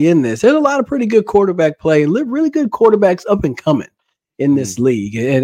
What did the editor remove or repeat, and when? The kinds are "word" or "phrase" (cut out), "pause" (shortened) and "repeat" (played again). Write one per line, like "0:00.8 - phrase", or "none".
none